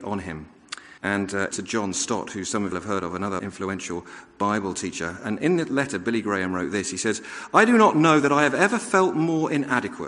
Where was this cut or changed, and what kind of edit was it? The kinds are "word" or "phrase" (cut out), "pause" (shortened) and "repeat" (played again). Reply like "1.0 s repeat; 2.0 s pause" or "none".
1.0 s pause; 1.5 s phrase; 2.7 s phrase; 3.4 s word